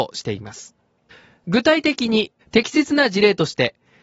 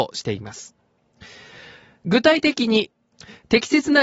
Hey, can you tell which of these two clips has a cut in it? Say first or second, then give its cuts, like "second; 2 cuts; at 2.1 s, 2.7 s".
first; 2 cuts; at 1.1 s, 2.4 s